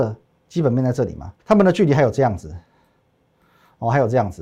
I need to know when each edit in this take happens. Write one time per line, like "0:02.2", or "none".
0:01.4